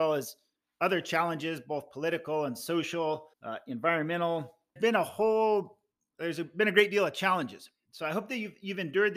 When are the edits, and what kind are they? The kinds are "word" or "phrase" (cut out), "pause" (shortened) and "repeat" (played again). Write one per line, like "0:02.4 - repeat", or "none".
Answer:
0:03.3 - pause
0:04.8 - phrase
0:05.9 - pause